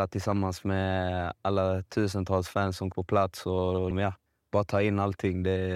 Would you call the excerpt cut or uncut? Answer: cut